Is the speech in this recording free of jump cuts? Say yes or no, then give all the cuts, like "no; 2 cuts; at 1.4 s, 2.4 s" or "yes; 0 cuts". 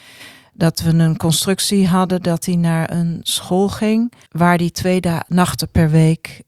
no; 1 cut; at 4.3 s